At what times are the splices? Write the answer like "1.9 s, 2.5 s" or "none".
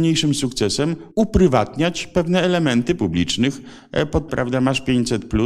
1.1 s, 3.0 s, 4.3 s